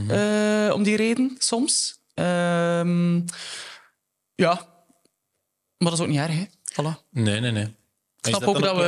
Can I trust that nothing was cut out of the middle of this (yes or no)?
yes